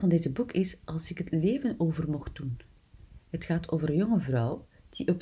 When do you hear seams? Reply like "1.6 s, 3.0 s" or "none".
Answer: none